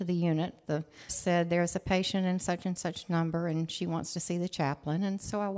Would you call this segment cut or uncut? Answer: cut